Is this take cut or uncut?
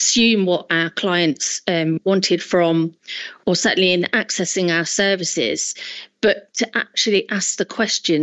uncut